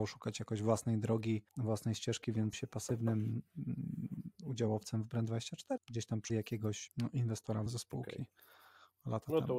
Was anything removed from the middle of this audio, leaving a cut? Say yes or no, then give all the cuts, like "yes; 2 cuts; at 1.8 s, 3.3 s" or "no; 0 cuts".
yes; 6 cuts; at 1.5 s, 2.5 s, 5.8 s, 6.3 s, 6.9 s, 7.7 s